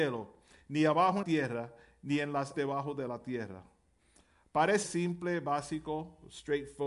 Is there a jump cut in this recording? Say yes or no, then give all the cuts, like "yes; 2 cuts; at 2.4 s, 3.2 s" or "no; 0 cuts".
yes; 3 cuts; at 1.2 s, 2.5 s, 4.8 s